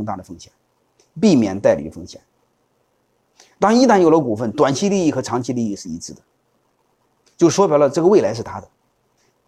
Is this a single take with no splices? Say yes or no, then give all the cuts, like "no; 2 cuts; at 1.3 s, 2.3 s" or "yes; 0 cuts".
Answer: yes; 0 cuts